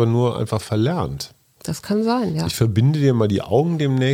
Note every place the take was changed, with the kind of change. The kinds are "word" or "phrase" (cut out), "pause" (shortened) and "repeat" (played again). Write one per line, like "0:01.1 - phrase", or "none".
none